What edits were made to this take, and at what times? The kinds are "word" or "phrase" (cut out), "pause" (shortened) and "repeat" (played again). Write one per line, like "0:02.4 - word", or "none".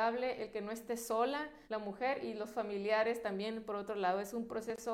0:01.6 - pause